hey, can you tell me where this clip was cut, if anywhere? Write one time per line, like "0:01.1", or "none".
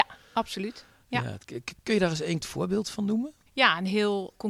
0:02.4